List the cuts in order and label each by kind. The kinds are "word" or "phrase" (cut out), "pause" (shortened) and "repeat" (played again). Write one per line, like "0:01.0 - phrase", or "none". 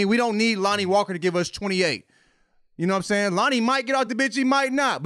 none